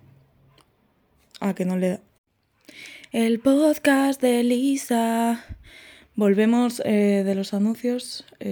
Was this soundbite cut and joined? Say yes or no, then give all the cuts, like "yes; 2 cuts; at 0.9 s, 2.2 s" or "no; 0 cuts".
no; 0 cuts